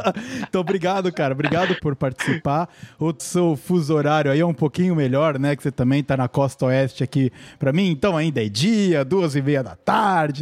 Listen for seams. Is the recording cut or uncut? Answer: cut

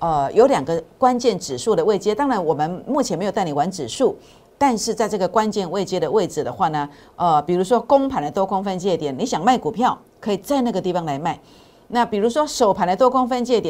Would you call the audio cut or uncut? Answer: uncut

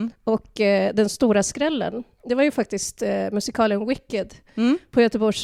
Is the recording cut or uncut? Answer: uncut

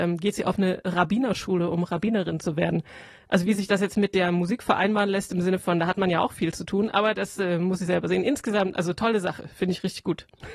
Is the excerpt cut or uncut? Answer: uncut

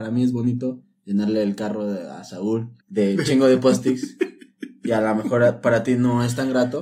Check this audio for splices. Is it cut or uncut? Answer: cut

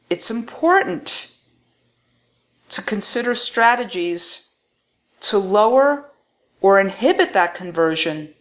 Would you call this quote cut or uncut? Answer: uncut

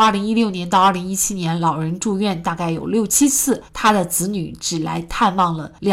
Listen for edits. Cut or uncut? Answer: cut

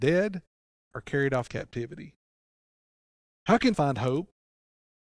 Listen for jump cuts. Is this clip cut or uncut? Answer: cut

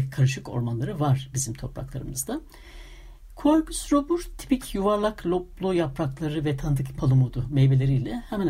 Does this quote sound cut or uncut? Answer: cut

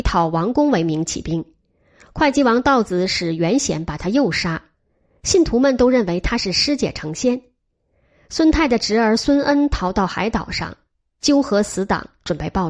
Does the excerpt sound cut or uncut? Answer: uncut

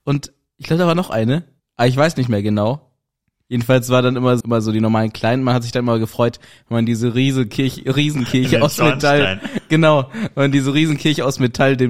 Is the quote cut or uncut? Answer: cut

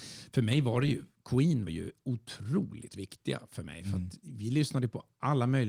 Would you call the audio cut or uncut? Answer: cut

